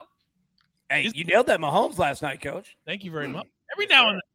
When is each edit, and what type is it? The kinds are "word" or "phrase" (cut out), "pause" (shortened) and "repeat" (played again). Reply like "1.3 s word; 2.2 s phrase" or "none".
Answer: 2.8 s pause